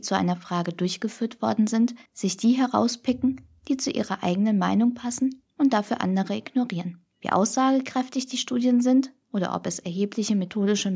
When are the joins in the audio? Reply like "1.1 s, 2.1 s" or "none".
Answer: 2.1 s, 7.1 s